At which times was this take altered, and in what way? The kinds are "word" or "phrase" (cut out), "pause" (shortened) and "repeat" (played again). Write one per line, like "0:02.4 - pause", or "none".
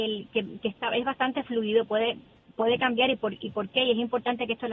none

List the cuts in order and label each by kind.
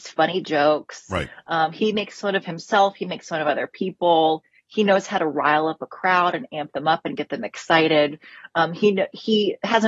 none

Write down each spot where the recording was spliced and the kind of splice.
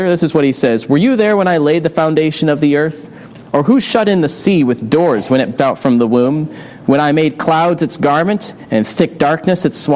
0:05.6 - word

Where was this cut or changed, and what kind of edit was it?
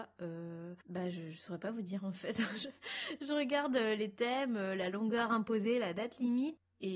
none

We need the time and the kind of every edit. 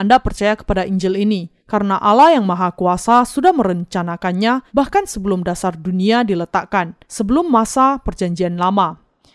0:01.6 - pause
0:04.7 - pause
0:07.0 - pause

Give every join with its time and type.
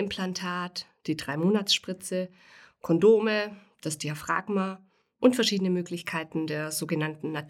none

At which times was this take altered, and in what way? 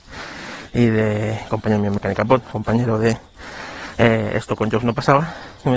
0:02.4 - phrase

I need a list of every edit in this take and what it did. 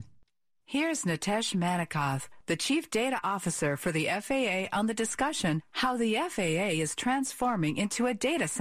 none

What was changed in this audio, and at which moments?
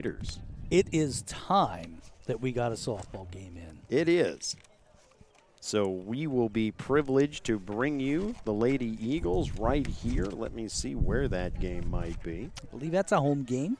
0:02.1 - pause
0:05.1 - pause

